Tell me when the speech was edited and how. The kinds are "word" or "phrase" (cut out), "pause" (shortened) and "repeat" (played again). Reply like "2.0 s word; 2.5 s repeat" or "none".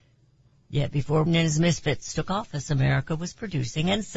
1.3 s word